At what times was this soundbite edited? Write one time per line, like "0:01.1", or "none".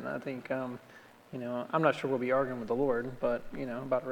none